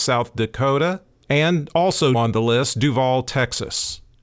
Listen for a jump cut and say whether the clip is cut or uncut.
cut